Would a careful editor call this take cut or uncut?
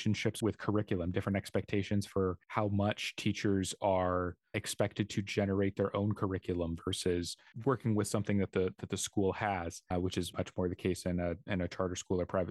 cut